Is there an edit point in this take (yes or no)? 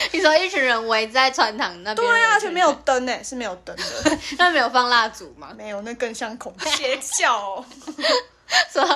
yes